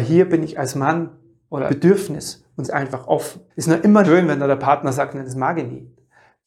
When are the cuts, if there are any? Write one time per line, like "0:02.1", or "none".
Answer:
0:01.7
0:02.6
0:03.5
0:04.0